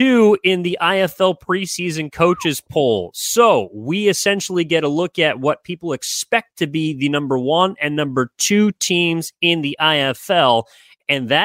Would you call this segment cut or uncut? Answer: uncut